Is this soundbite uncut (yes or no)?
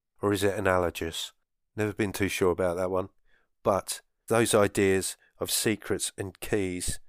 no